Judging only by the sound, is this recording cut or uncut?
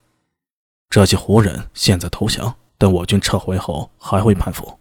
cut